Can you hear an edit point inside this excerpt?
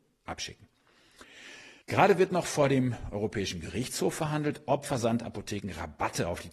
yes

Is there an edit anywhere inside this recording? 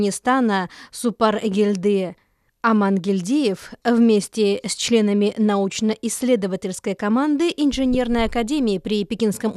no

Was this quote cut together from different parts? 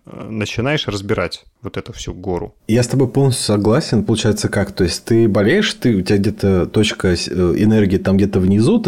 yes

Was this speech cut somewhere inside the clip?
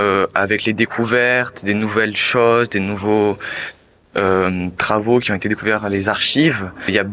no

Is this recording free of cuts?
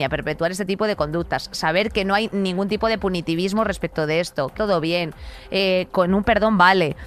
no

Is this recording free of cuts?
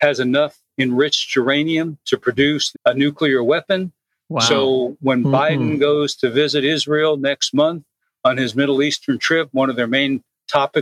no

